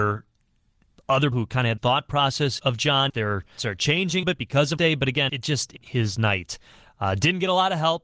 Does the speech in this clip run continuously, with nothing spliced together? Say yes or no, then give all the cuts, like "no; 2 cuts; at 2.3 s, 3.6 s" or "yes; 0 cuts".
no; 9 cuts; at 1.3 s, 1.8 s, 2.6 s, 3.1 s, 3.6 s, 4.2 s, 4.8 s, 5.3 s, 5.8 s